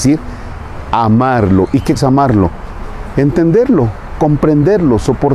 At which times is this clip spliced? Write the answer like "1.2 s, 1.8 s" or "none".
2.0 s